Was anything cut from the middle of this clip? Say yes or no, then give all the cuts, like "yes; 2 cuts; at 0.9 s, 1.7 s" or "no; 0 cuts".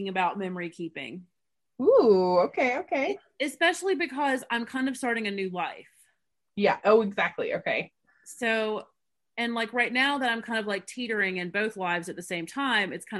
no; 0 cuts